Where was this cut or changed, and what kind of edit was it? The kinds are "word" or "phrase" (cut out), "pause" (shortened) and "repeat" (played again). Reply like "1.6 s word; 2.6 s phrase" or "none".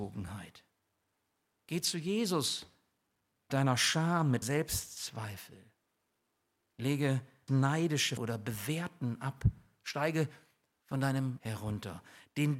3.5 s word; 4.4 s word; 7.5 s word; 8.2 s word; 11.4 s word

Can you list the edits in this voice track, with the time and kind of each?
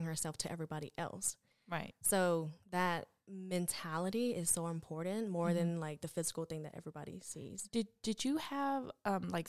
none

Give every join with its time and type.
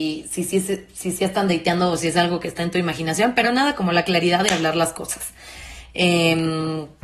none

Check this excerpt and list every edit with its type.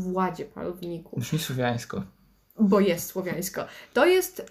none

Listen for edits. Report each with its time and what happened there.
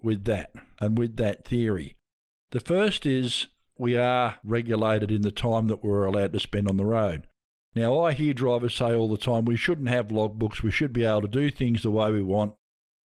none

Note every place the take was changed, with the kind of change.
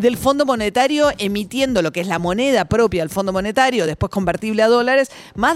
none

